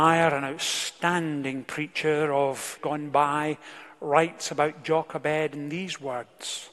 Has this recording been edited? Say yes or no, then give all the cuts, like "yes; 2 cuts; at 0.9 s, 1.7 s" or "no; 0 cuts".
yes; 1 cut; at 2.8 s